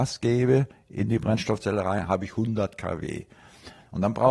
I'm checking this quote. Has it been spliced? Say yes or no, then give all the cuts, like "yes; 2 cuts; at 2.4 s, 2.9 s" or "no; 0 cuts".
no; 0 cuts